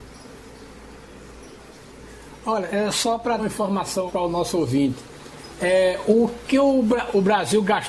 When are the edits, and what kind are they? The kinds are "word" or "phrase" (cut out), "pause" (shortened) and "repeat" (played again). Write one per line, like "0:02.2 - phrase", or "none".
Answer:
0:03.4 - word
0:04.1 - word